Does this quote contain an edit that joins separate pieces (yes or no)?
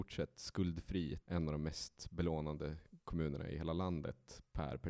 yes